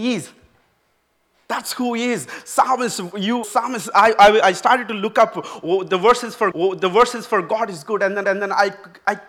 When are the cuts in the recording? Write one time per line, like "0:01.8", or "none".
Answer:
0:03.4
0:06.5
0:08.2